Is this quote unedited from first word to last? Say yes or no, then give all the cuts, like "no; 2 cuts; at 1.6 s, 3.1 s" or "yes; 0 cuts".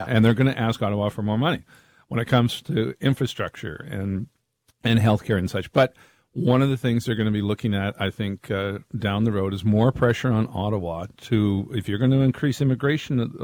yes; 0 cuts